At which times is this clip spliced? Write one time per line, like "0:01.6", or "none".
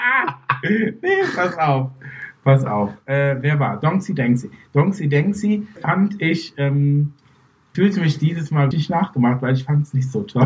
0:05.8
0:07.7
0:08.7

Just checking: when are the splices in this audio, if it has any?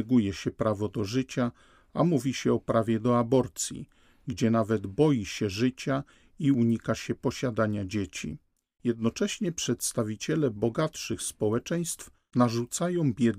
none

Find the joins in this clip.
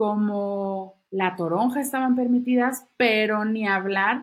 0:01.1

